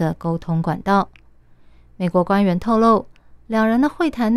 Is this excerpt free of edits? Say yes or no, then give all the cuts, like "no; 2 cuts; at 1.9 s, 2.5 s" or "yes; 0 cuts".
yes; 0 cuts